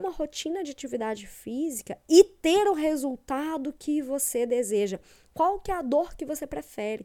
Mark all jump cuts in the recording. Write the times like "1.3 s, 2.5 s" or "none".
none